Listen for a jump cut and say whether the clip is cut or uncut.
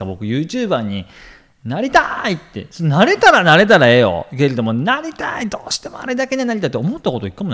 uncut